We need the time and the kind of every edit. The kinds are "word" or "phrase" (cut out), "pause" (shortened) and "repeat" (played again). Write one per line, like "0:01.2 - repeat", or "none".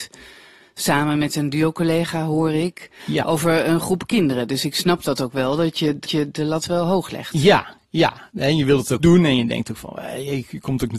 0:06.0 - repeat
0:09.0 - word